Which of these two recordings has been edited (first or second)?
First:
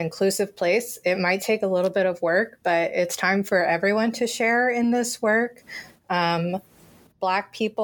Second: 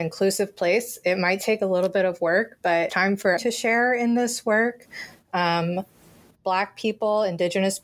second